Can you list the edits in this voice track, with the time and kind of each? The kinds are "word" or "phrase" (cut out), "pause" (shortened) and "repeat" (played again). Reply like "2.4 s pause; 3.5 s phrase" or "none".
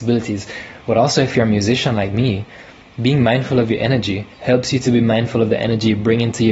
4.3 s pause